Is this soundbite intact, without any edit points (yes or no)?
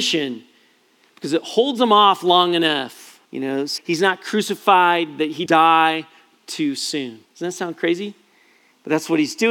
no